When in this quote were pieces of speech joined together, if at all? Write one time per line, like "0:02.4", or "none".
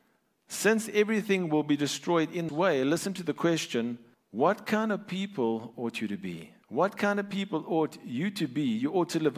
0:02.5
0:04.1
0:06.6